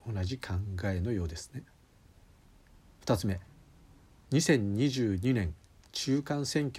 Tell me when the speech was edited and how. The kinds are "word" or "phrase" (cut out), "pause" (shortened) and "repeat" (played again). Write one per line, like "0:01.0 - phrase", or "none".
none